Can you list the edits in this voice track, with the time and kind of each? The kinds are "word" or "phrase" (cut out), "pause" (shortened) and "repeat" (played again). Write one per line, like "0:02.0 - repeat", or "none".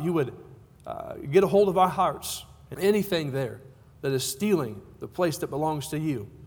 0:02.7 - phrase